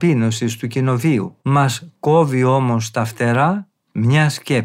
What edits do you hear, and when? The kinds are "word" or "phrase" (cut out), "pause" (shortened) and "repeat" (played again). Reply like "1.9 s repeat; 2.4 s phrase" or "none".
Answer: 1.4 s pause

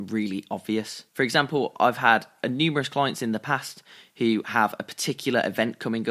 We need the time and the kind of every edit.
1.1 s pause

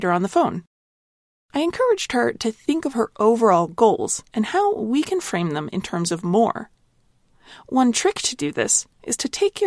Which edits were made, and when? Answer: 4.3 s pause

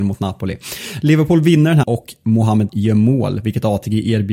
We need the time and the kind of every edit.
1.8 s word; 2.7 s word

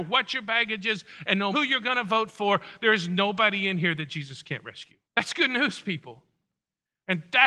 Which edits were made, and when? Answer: 1.5 s word; 5.0 s pause

